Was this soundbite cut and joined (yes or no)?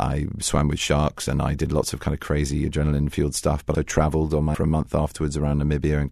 yes